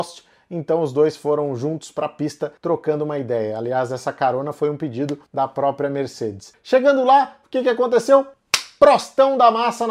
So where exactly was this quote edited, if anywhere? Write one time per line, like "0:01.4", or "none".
0:02.6
0:05.3